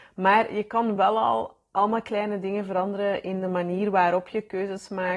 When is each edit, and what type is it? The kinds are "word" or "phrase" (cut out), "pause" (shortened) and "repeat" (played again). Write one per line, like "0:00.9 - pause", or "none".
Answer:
none